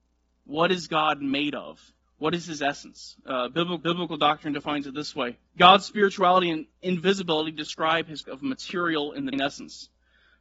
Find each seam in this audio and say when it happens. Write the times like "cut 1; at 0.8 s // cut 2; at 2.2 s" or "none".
cut 1; at 2.0 s // cut 2; at 3.8 s // cut 3; at 5.5 s // cut 4; at 8.2 s // cut 5; at 9.3 s